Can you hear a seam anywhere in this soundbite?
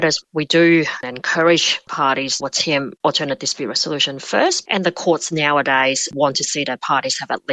yes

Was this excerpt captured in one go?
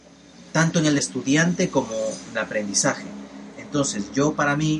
no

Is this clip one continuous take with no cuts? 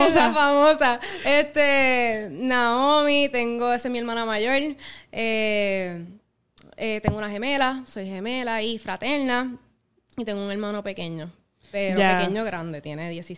yes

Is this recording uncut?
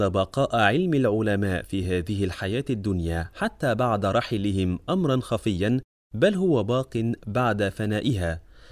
yes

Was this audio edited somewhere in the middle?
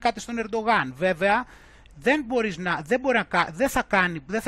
no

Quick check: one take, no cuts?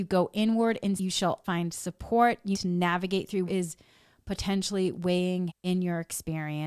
no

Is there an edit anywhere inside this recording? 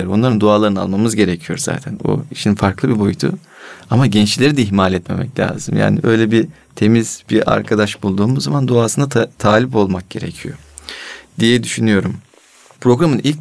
no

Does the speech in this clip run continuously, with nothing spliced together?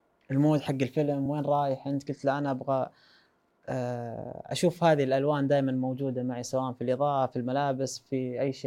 yes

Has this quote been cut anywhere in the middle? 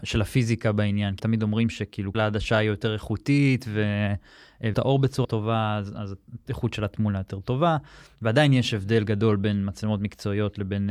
yes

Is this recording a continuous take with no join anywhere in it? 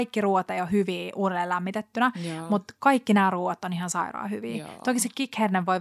yes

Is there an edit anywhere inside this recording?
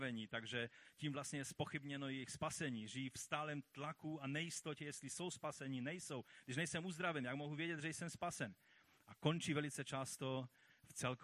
no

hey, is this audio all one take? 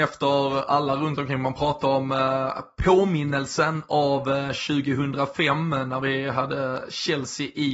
yes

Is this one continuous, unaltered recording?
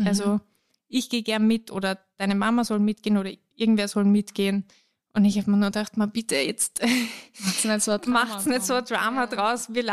yes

